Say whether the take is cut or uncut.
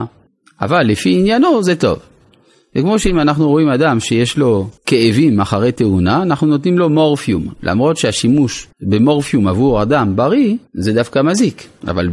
cut